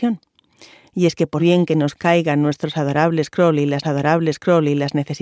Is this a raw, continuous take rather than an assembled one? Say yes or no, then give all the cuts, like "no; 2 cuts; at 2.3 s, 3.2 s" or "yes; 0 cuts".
no; 2 cuts; at 1.4 s, 3.8 s